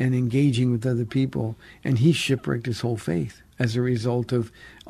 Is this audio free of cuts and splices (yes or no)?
no